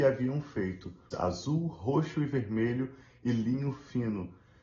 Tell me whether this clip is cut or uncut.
cut